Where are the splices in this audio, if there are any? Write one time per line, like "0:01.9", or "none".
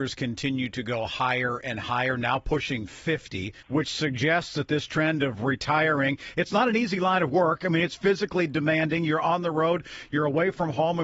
0:03.6